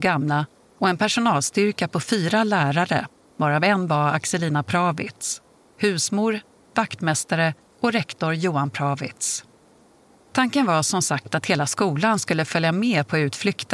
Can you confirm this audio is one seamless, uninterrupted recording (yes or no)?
yes